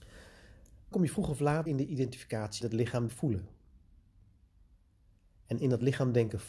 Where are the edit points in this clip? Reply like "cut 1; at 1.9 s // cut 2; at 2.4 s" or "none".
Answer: cut 1; at 0.9 s // cut 2; at 1.7 s // cut 3; at 2.6 s // cut 4; at 3.1 s